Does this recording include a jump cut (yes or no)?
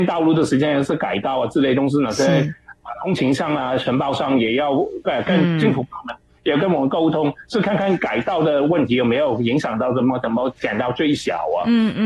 no